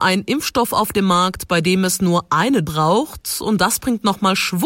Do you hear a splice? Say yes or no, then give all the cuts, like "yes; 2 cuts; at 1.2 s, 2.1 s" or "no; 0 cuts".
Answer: yes; 1 cut; at 2.6 s